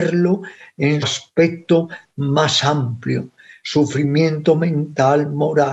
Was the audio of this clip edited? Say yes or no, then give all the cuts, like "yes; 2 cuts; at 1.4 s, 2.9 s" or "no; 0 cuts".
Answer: yes; 1 cut; at 1.0 s